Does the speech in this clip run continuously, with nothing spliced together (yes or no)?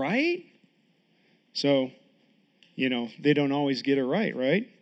yes